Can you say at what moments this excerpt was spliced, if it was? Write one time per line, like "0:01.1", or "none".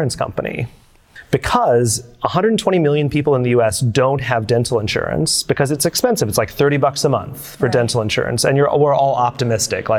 none